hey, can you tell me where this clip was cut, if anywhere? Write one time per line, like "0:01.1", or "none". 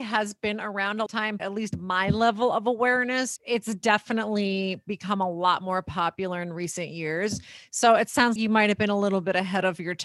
0:01.1
0:01.4
0:03.4
0:08.4